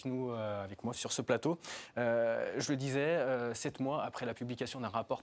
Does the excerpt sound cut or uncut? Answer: cut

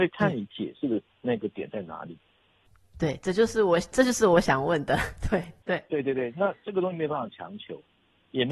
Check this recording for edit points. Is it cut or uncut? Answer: uncut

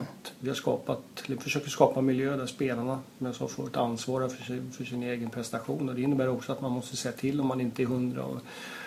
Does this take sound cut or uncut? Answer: uncut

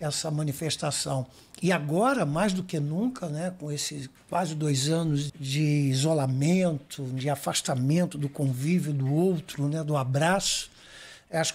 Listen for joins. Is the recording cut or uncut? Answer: cut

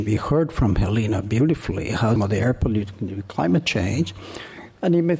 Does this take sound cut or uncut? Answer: cut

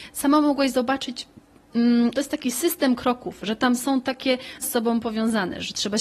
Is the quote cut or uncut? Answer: cut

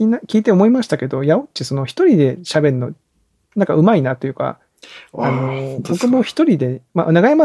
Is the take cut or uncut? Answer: uncut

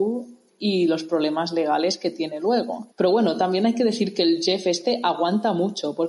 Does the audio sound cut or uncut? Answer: cut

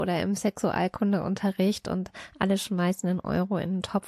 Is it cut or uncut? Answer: uncut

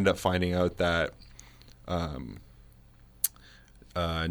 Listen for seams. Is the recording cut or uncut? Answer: uncut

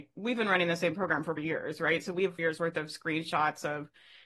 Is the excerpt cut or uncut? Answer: cut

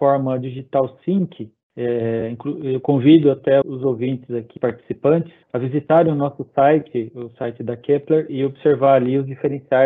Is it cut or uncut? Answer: cut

